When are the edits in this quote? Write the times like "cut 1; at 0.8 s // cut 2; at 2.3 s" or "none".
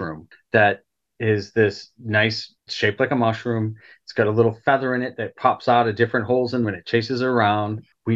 cut 1; at 2.7 s // cut 2; at 6.6 s